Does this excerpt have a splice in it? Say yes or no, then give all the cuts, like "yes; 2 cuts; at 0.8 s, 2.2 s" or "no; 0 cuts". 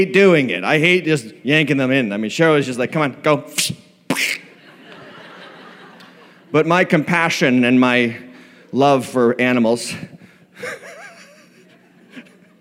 no; 0 cuts